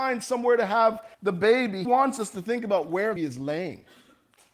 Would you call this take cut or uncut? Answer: cut